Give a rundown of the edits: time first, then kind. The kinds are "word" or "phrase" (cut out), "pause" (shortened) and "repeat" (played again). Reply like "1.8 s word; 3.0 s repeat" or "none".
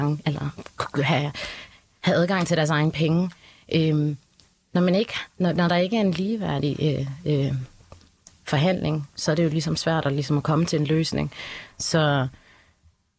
none